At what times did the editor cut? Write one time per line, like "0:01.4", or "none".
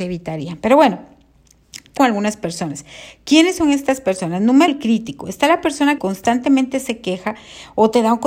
0:02.0
0:04.7
0:06.0